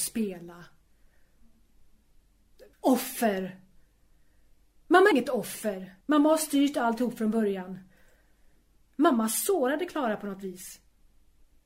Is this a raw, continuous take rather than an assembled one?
no; 3 cuts; at 2.7 s, 5.1 s, 6.0 s

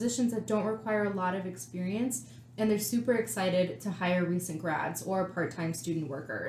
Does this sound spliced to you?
no; 0 cuts

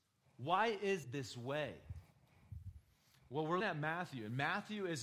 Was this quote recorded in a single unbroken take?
no; 2 cuts; at 1.0 s, 3.6 s

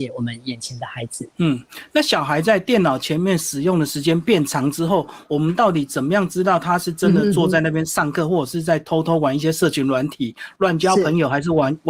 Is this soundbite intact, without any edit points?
no; 1 cut; at 1.3 s

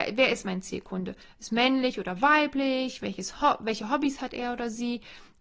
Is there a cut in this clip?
no; 0 cuts

